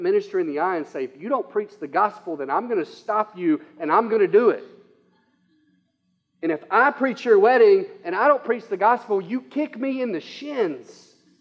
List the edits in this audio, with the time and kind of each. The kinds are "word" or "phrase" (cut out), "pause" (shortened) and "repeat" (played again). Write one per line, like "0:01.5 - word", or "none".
none